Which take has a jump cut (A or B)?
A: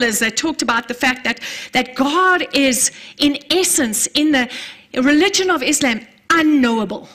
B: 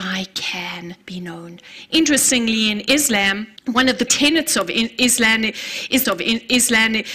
B